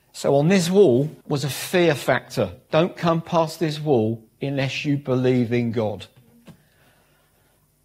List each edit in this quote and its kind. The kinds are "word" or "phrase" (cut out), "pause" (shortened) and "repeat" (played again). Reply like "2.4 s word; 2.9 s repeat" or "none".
1.2 s pause